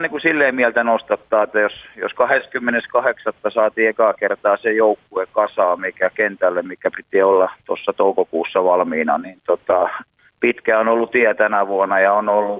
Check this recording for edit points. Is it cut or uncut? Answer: uncut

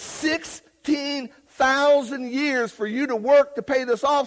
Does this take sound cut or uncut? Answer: uncut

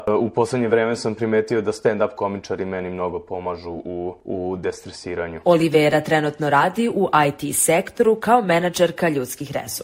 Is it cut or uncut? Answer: uncut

